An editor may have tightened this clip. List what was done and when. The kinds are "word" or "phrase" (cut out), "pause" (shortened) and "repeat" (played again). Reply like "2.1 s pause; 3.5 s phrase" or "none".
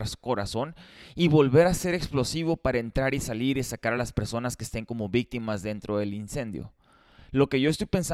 none